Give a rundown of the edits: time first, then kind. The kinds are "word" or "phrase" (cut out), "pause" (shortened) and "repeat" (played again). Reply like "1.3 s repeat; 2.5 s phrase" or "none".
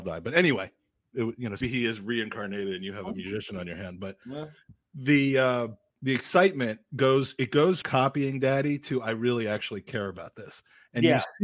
1.6 s word; 5.9 s pause; 7.8 s word